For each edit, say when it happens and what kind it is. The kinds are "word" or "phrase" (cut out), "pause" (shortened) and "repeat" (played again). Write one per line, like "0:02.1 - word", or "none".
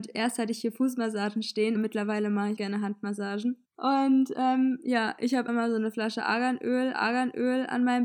0:01.8 - word
0:02.6 - word
0:03.6 - pause
0:05.5 - word
0:06.9 - repeat